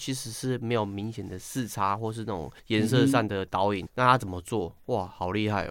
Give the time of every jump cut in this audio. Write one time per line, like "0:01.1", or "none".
0:02.6
0:03.9